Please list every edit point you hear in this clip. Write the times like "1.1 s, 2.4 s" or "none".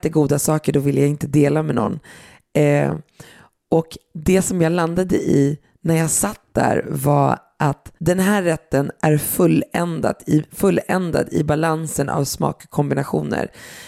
8.0 s